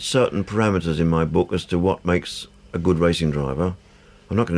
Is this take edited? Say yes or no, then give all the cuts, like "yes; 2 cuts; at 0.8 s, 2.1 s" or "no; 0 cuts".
no; 0 cuts